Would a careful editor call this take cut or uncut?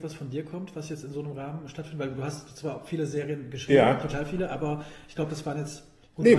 uncut